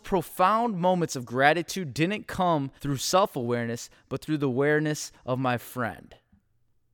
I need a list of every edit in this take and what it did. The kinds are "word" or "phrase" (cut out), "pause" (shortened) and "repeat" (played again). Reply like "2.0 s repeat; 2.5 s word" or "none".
2.8 s pause